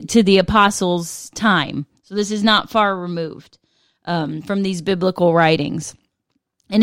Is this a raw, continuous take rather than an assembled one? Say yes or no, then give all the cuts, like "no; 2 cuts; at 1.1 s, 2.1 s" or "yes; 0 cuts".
yes; 0 cuts